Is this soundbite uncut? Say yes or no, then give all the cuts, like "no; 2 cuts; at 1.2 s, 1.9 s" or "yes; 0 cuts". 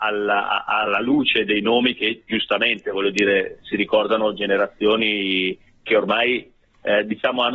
yes; 0 cuts